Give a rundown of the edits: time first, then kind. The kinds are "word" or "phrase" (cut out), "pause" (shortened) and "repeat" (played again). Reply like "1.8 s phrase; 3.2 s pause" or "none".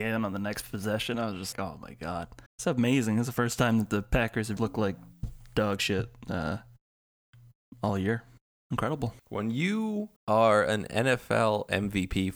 1.5 s word; 2.5 s pause; 4.6 s word; 9.2 s pause; 10.2 s pause